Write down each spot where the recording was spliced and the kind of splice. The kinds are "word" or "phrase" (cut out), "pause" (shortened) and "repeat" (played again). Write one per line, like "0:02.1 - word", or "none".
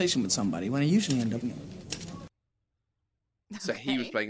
0:01.4 - word